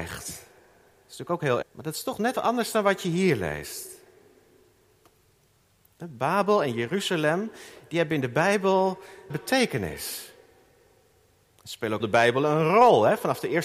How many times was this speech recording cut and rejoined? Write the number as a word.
four